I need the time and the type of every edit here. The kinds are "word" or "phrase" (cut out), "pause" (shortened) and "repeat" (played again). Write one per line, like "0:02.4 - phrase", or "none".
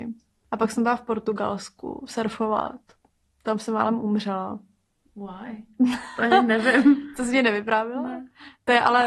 none